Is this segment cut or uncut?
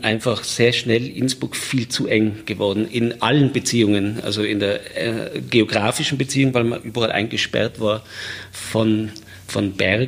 uncut